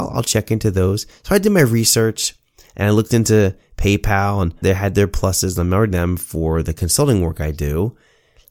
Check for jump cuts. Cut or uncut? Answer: cut